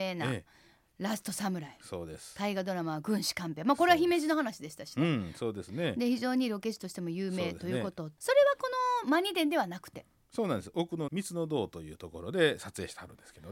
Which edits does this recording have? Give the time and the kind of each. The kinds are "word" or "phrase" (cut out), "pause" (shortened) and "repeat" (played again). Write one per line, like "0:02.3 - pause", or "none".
0:08.2 - phrase
0:11.1 - word